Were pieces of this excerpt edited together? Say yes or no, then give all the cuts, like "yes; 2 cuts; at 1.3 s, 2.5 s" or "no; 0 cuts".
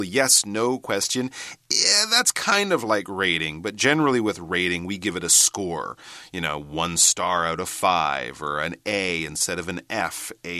no; 0 cuts